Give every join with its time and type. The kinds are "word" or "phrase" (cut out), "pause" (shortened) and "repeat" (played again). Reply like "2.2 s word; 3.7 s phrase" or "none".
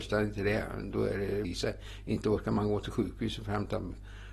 1.4 s phrase